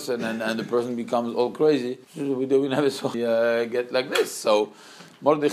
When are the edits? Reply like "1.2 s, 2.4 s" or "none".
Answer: 2.0 s, 3.1 s